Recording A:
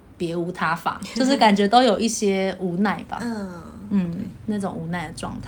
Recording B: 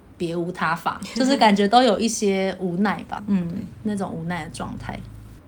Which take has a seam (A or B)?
B